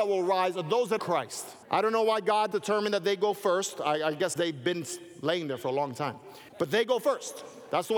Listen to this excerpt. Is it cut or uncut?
cut